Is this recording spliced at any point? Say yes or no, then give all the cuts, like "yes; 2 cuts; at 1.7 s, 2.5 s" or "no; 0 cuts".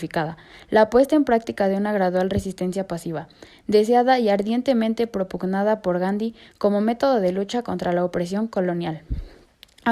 no; 0 cuts